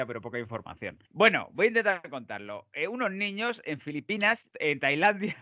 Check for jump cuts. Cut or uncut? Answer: cut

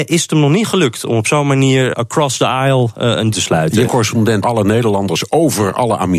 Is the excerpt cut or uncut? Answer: cut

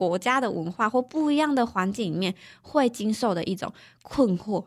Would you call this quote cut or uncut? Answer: uncut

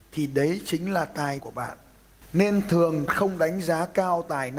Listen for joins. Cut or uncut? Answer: cut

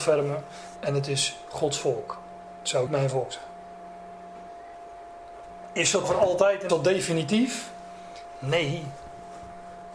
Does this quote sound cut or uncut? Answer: cut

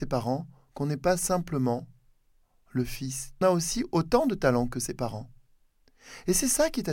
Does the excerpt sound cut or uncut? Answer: cut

